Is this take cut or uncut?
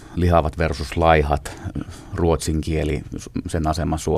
uncut